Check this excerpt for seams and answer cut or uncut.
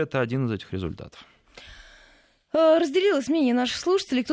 uncut